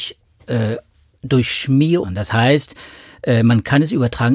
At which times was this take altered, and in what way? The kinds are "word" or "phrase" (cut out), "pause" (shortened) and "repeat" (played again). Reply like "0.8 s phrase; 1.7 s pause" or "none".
2.0 s phrase

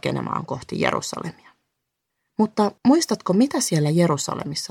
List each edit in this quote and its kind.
2.8 s pause

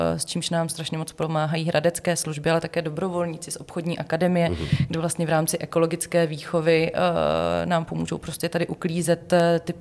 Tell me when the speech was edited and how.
none

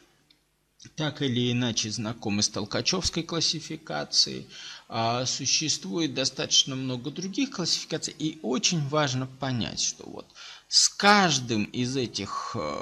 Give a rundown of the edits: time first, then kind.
none

